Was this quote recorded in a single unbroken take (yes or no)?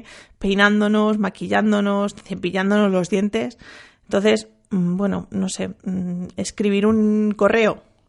yes